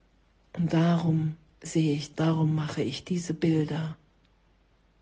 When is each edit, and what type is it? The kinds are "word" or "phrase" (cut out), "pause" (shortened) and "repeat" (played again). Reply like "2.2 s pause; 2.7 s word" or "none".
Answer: 2.1 s word